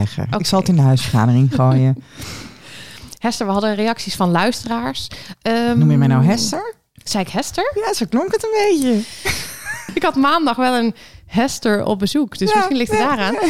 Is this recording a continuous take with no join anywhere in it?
yes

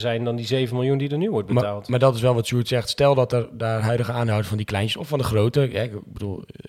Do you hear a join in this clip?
no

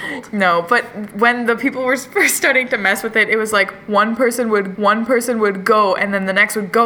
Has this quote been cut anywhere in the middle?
yes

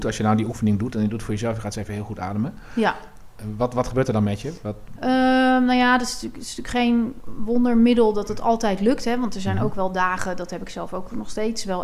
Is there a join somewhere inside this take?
no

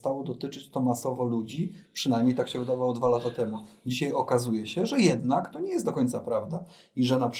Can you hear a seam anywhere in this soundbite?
no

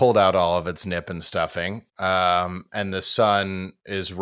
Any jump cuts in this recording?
yes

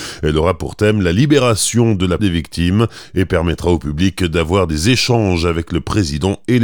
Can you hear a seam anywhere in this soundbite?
yes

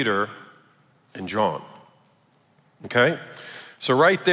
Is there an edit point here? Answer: no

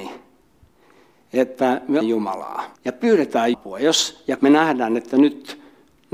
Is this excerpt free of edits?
no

